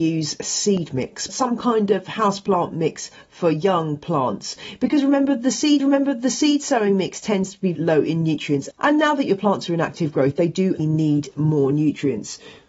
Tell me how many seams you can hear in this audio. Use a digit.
5